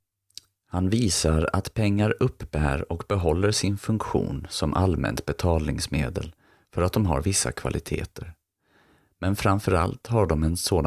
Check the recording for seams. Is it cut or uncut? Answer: uncut